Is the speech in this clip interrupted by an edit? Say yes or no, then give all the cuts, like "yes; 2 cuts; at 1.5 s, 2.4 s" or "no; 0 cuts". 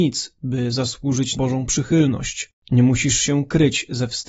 yes; 2 cuts; at 1.3 s, 2.6 s